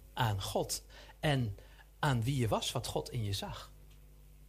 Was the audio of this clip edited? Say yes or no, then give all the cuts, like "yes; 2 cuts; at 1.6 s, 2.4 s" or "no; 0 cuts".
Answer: no; 0 cuts